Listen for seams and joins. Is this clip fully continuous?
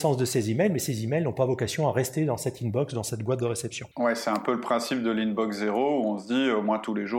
no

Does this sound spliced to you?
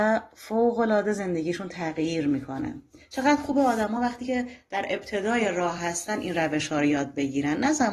no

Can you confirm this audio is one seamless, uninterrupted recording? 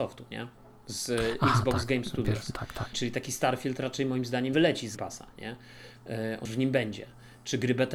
no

